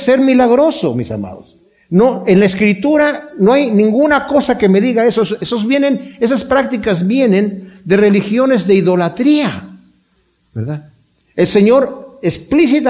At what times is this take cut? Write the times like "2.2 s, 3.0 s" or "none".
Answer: none